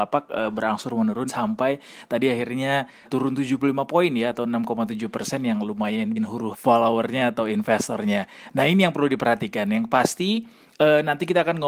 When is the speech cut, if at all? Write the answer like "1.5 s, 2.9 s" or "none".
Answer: 1.3 s, 3.0 s, 6.2 s, 6.5 s